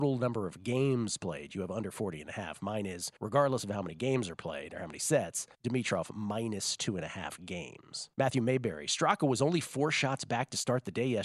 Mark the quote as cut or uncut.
cut